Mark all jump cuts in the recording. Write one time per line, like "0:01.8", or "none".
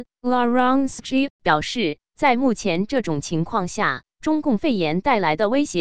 0:01.0